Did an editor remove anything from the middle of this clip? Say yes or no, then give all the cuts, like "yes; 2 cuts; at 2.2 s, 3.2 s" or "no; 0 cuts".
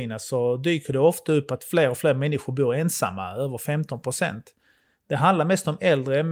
no; 0 cuts